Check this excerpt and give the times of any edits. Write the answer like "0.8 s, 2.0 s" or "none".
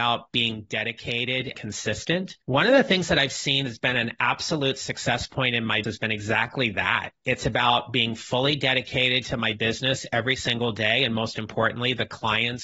1.5 s, 2.4 s, 3.7 s, 5.8 s, 7.2 s